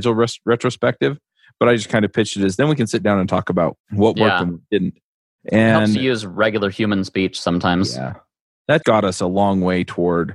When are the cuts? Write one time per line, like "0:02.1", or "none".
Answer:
0:08.8